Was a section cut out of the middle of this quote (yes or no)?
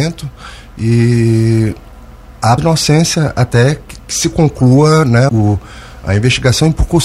yes